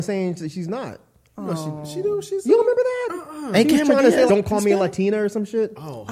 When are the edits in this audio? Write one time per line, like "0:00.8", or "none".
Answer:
0:04.3